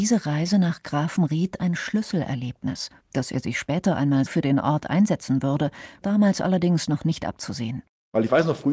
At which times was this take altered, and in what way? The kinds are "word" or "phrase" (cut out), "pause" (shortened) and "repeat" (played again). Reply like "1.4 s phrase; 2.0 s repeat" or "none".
3.0 s pause; 4.3 s word; 6.0 s word